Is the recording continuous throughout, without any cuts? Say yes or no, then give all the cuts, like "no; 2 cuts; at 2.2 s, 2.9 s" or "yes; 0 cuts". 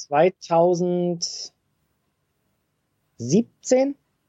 yes; 0 cuts